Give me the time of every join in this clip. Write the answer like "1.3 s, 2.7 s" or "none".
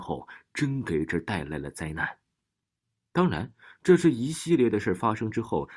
none